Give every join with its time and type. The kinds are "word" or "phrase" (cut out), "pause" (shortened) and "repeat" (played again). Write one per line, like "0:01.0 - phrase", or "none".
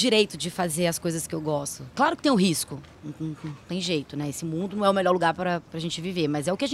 0:05.7 - pause

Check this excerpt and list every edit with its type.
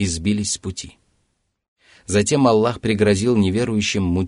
none

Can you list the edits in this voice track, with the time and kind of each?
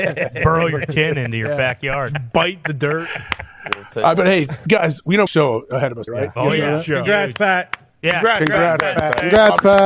0:04.1 - word
0:05.3 - phrase
0:06.1 - word

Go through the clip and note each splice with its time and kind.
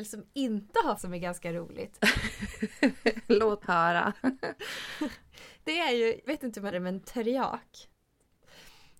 0:01.0 - word
0:03.6 - word
0:06.3 - word
0:06.7 - word

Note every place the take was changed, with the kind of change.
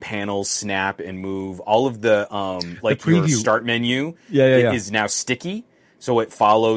none

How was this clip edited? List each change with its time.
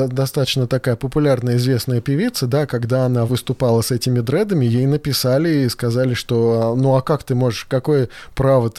0:03.3 - word

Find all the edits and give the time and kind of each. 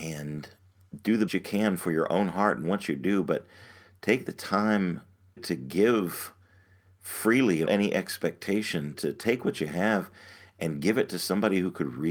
0:01.3 - word
0:05.4 - word
0:07.7 - word
0:08.9 - word

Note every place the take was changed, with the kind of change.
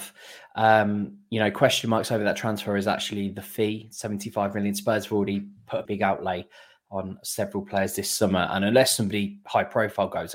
0:05.8 - word

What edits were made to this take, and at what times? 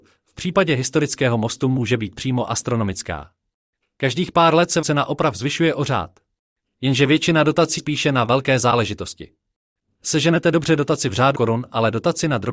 0:04.8 - word
0:07.8 - word
0:11.3 - word

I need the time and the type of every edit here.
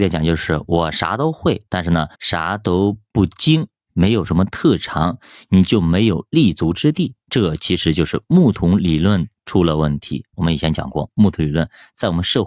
0:01.7 - pause
0:02.1 - pause
0:07.2 - pause

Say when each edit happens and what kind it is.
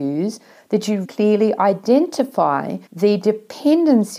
0:01.0 - word
0:02.9 - pause

